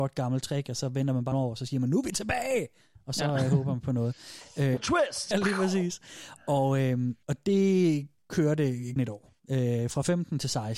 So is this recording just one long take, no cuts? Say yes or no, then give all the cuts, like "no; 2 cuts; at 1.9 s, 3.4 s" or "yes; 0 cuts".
no; 6 cuts; at 1.3 s, 4.8 s, 5.3 s, 7.2 s, 9.0 s, 9.4 s